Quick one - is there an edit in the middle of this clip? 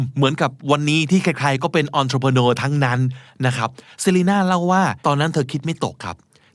yes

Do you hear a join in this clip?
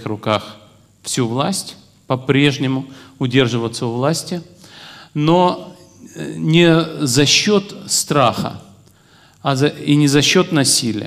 no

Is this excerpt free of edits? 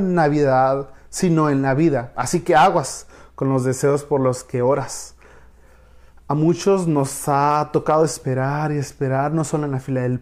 yes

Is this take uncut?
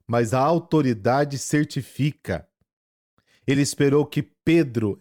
yes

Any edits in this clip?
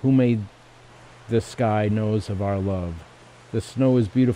no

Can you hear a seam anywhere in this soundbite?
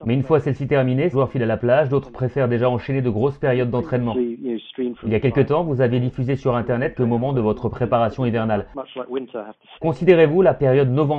yes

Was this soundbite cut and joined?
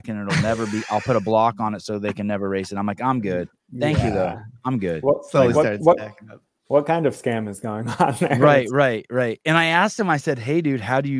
no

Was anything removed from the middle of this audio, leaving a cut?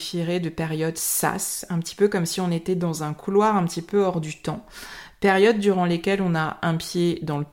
no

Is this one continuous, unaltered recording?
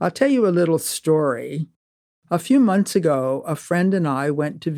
yes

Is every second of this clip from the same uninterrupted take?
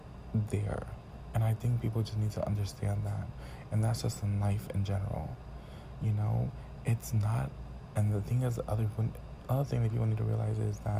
yes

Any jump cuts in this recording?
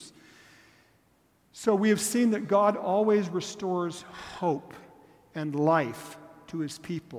no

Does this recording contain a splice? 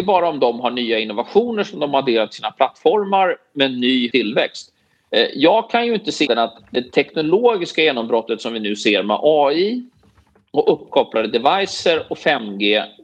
yes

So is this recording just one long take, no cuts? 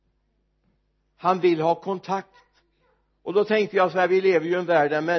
yes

